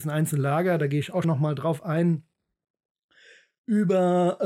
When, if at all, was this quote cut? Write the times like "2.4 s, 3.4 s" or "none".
1.2 s